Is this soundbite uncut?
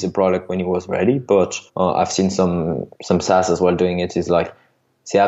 no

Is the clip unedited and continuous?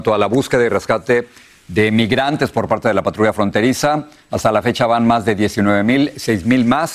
yes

